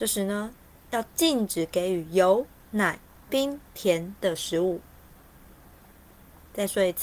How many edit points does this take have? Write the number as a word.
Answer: zero